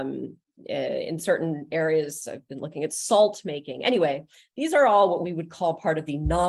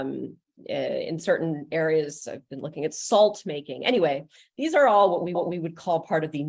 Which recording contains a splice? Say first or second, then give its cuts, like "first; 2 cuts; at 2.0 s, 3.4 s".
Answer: second; 1 cut; at 5.3 s